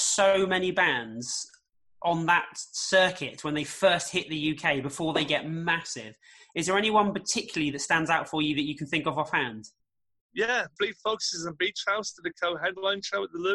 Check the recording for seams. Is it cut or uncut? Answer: uncut